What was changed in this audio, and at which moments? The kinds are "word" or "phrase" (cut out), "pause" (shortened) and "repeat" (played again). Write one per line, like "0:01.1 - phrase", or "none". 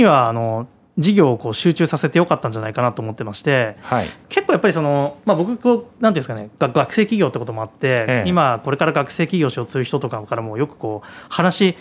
none